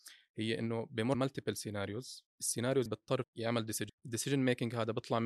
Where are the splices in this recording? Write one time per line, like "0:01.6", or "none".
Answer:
0:01.1
0:02.9
0:03.2
0:03.9